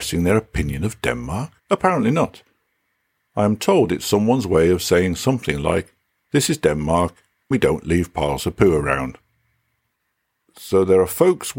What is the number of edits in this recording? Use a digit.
3